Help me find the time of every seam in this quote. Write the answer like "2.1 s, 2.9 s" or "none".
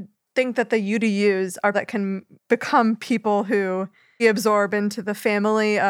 1.7 s, 2.4 s, 4.2 s